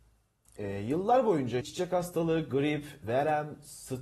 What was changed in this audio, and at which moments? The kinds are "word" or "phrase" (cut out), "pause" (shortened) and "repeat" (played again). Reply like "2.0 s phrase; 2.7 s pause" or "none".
1.6 s word; 3.0 s word